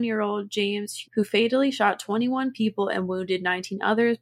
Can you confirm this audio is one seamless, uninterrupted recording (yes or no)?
no